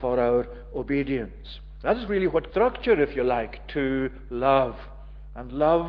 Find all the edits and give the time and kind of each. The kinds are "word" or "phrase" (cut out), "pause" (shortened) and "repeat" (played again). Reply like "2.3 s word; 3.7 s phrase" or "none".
2.5 s word